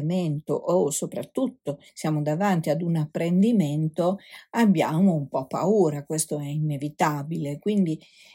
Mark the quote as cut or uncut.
cut